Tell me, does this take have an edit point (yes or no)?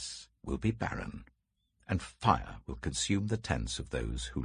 no